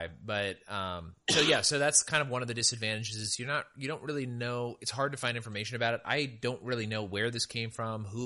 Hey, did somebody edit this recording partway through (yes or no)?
no